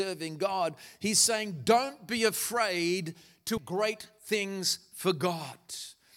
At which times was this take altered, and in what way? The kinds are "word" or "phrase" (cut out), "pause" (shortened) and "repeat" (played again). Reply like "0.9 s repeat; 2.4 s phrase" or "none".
3.6 s word